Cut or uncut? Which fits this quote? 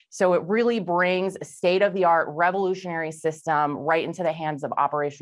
uncut